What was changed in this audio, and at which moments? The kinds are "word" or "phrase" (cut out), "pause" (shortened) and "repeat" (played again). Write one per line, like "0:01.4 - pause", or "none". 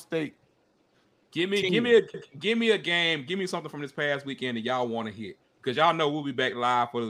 0:02.1 - repeat
0:05.4 - pause